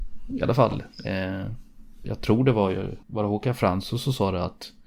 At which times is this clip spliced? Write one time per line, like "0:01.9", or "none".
0:02.0
0:03.0